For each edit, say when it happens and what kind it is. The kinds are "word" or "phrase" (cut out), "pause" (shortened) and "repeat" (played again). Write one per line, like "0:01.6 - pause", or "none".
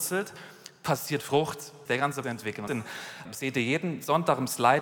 0:01.9 - word
0:02.2 - phrase
0:02.7 - phrase
0:03.3 - phrase